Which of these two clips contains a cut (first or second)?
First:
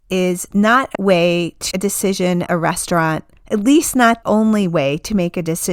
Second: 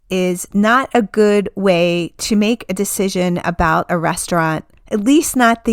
first